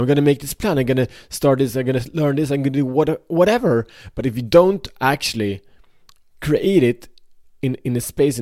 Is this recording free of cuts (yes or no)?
yes